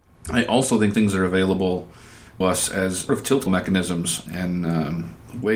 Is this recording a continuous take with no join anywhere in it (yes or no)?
no